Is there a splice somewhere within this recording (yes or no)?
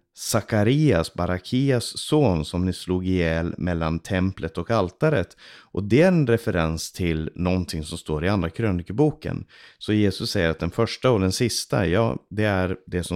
no